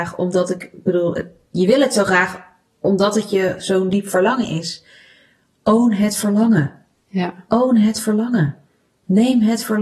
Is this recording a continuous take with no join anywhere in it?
yes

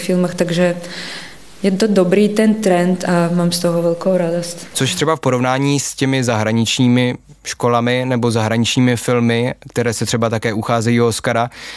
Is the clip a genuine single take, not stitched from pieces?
yes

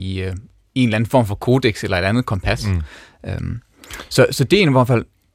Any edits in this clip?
no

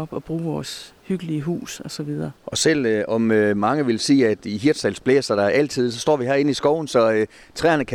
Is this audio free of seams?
no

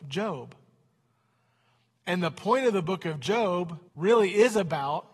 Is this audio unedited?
no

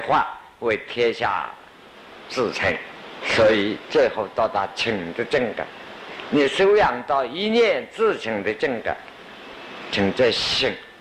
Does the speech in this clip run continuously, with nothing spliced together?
no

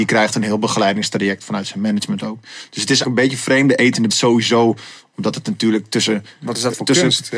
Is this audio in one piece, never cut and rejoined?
no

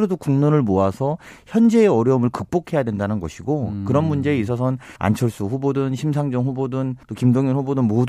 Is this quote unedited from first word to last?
no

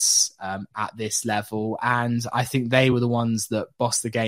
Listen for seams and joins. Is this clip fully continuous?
yes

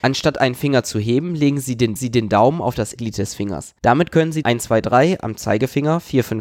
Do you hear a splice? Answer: yes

